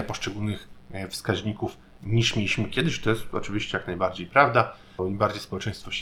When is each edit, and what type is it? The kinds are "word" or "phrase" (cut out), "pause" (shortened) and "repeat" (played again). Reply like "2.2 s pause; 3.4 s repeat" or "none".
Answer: 5.0 s word

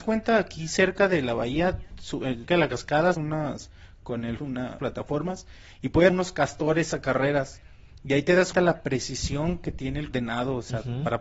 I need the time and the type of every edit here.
2.5 s word; 3.1 s word; 4.4 s word; 4.8 s word; 6.1 s word; 8.5 s word; 10.1 s word

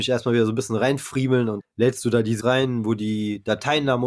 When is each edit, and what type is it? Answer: 1.6 s word; 2.4 s word

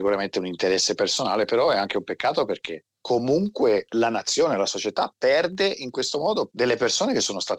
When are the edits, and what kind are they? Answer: 2.9 s pause

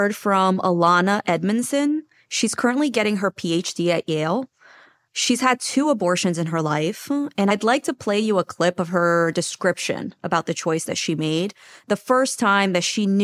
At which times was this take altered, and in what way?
none

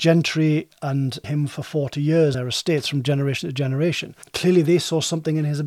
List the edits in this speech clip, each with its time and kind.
1.2 s phrase; 2.3 s word

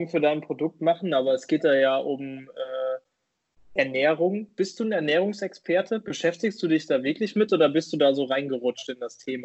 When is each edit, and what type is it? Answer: none

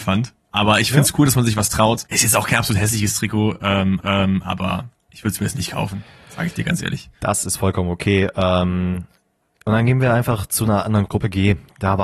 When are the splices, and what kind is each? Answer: 2.1 s pause; 4.0 s repeat; 7.1 s pause; 11.1 s word

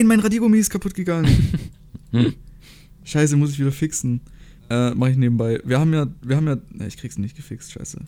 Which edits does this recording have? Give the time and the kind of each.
4.6 s pause

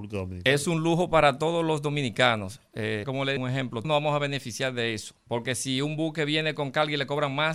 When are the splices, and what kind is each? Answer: 3.0 s word; 3.4 s word; 3.8 s word

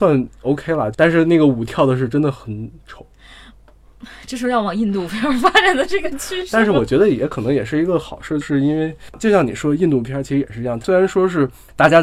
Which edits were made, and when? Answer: 8.4 s phrase

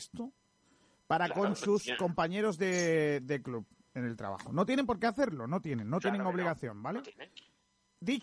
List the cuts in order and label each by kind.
none

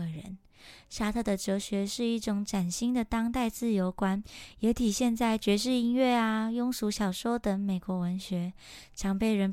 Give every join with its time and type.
none

